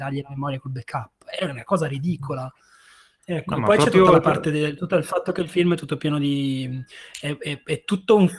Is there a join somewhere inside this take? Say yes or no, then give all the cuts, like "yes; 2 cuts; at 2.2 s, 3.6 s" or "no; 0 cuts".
no; 0 cuts